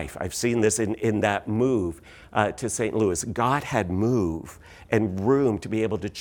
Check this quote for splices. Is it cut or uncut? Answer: uncut